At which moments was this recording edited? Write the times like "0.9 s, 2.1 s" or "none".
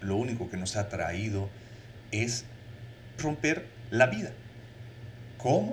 3.2 s

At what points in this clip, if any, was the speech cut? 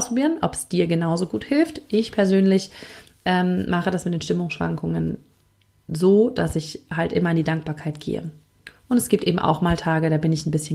none

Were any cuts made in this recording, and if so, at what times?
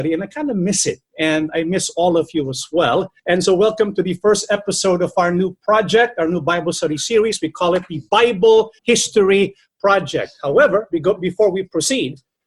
3.2 s, 8.8 s

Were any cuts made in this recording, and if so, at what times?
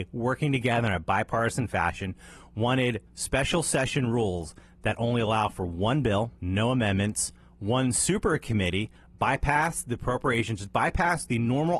3.1 s, 6.4 s

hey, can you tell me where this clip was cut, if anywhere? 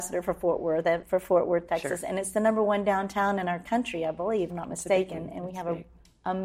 1.0 s, 4.5 s

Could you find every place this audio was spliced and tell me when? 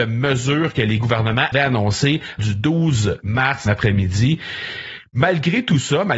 1.5 s, 2.4 s, 3.7 s

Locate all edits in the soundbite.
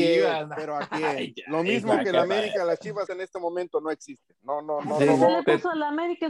3.1 s

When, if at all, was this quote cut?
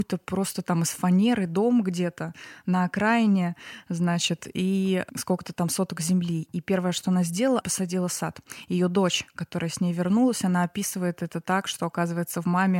7.6 s

